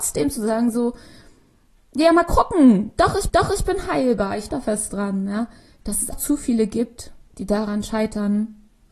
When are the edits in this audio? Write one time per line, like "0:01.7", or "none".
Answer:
0:03.3
0:04.5
0:06.1